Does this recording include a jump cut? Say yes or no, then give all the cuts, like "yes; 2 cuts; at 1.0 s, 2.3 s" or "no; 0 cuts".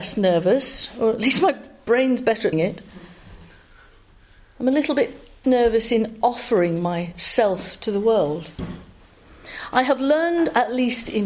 yes; 2 cuts; at 2.5 s, 5.4 s